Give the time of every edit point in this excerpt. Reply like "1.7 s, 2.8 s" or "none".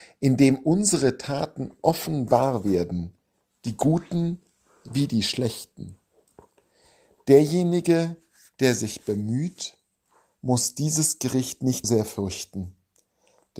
11.8 s

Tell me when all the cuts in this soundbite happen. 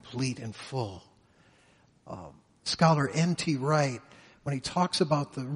none

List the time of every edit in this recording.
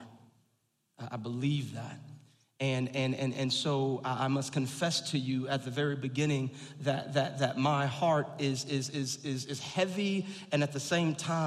none

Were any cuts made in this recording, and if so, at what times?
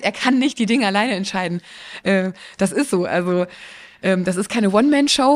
none

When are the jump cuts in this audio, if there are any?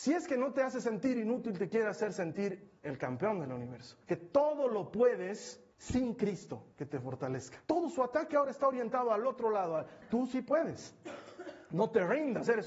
2.8 s, 4.0 s, 5.7 s, 6.7 s, 7.6 s

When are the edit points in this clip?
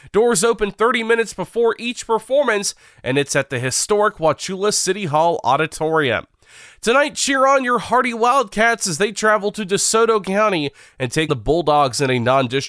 11.3 s

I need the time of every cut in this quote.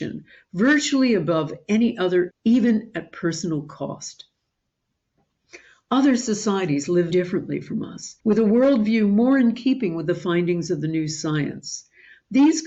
2.3 s, 7.1 s, 8.2 s

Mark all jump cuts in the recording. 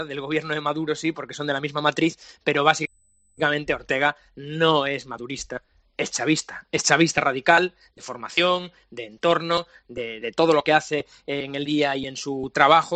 10.2 s, 11.7 s

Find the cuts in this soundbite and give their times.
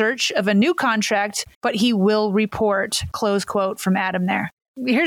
1.5 s

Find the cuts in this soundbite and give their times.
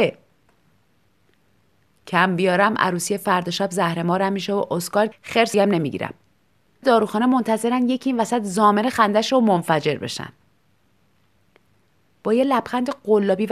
5.1 s, 5.5 s, 6.8 s, 9.3 s

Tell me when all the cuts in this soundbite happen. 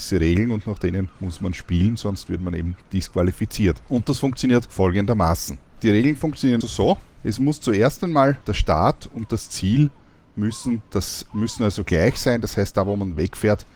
1.2 s, 6.6 s, 10.9 s

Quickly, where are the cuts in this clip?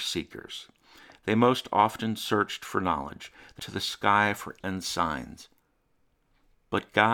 3.6 s, 4.6 s

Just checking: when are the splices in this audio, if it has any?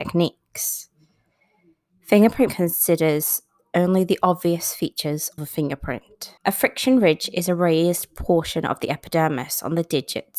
2.5 s, 5.4 s, 6.4 s

